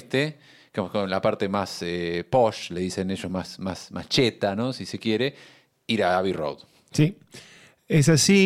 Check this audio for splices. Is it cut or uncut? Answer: uncut